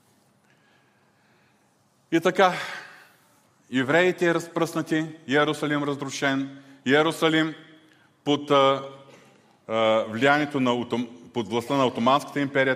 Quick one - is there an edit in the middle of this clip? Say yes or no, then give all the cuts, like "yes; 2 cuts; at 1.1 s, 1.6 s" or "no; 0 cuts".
no; 0 cuts